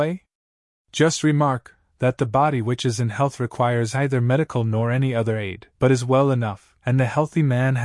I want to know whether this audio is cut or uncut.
cut